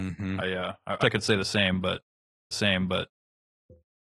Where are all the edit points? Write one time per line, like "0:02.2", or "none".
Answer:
0:01.0
0:02.5